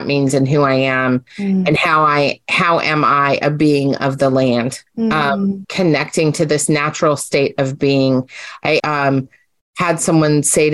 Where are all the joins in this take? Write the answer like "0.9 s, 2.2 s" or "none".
4.9 s, 5.6 s, 8.8 s